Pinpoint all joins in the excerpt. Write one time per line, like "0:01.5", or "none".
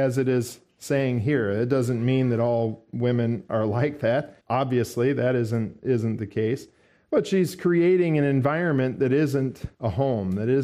0:04.4
0:06.8
0:09.7